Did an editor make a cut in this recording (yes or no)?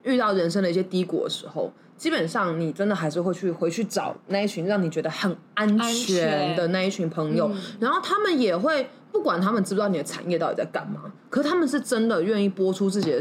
no